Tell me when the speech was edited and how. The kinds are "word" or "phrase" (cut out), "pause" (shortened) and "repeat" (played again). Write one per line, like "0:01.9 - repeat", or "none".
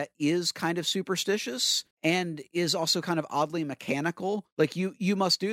0:01.9 - pause
0:04.5 - pause